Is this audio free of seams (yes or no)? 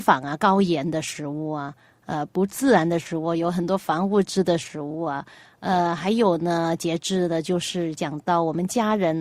yes